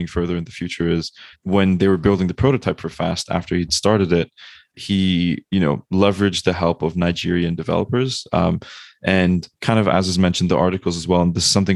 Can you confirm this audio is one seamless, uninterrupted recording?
no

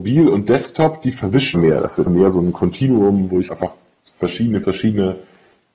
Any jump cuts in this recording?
yes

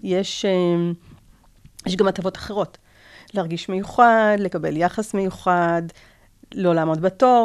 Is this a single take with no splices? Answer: yes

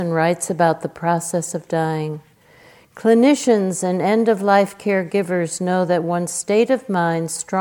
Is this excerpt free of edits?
yes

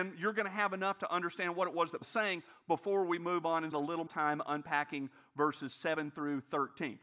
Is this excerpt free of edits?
no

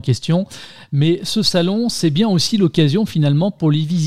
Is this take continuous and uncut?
yes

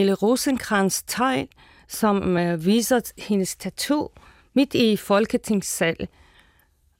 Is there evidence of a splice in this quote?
no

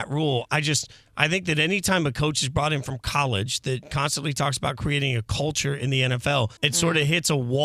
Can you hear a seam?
yes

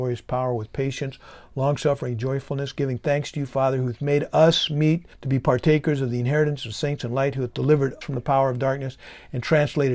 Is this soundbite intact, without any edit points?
no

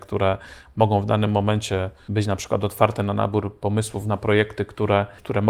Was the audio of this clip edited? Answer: no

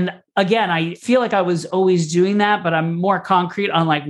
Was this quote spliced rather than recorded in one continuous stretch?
no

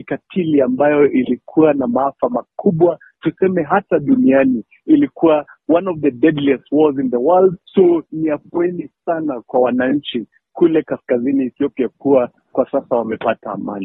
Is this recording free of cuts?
no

